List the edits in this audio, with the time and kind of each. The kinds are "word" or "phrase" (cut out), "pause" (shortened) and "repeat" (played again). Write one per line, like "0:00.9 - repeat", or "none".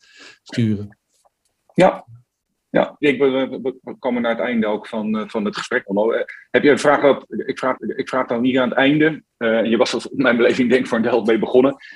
0:03.0 - phrase
0:05.8 - word
0:07.8 - repeat